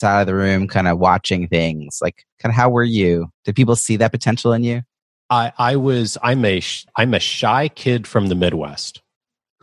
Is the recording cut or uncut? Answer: cut